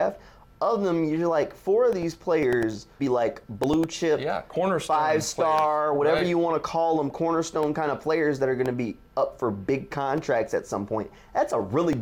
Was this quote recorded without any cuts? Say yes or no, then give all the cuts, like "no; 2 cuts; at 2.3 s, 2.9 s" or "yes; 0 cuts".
no; 1 cut; at 3.0 s